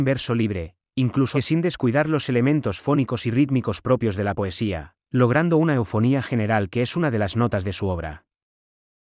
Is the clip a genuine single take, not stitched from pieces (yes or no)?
no